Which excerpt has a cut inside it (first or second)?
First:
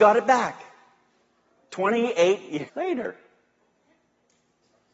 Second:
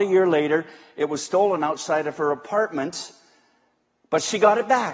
first